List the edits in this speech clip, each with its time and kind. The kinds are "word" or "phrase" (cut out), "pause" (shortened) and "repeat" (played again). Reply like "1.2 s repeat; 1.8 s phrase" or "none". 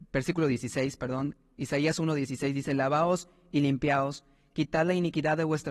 none